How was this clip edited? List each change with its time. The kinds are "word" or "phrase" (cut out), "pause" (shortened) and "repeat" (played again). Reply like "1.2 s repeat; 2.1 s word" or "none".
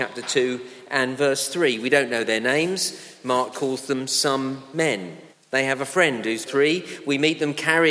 3.5 s word; 5.3 s pause; 6.5 s phrase

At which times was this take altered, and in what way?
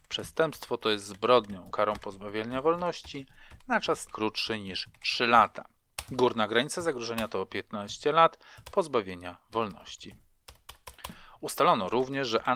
1.7 s word; 4.1 s word

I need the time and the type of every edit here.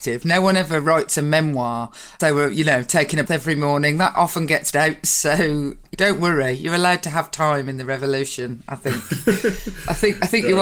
2.2 s phrase; 3.3 s word; 4.1 s word; 4.7 s word; 5.9 s word

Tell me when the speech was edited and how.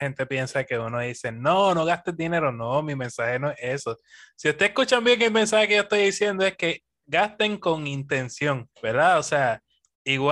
8.7 s pause

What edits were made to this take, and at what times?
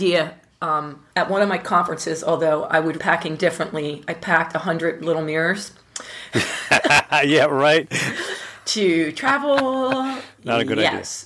1.1 s pause; 3.0 s word

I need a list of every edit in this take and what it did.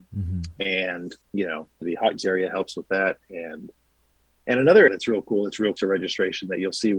1.2 s word; 1.8 s word; 2.2 s word; 4.9 s word; 5.8 s word

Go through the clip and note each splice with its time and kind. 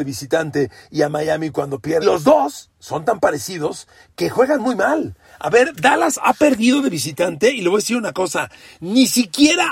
2.0 s phrase

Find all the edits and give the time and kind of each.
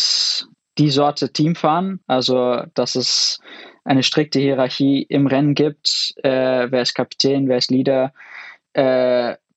2.0 s pause

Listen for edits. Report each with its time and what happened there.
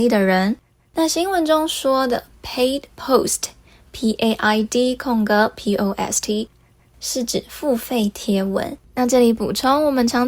8.8 s pause

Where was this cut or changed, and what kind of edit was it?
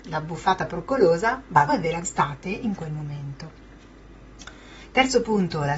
1.7 s word; 2.0 s word

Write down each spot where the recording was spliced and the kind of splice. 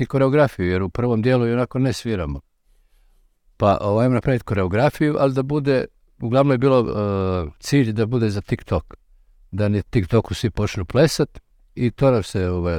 none

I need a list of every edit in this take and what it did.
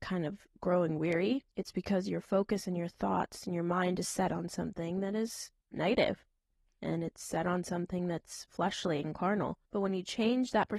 1.5 s pause; 5.6 s pause; 9.6 s pause

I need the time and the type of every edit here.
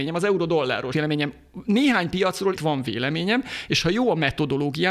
0.9 s word; 2.6 s word

